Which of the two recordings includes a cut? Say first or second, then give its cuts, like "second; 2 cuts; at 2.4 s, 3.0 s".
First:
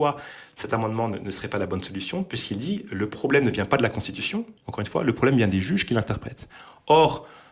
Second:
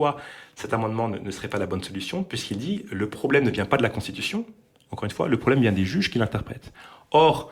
first; 1 cut; at 4.6 s